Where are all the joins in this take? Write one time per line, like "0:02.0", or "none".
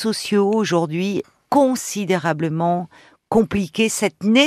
0:01.2